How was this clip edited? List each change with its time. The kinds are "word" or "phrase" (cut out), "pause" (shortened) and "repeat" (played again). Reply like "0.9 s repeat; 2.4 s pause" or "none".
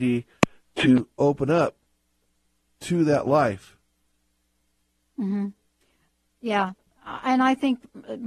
none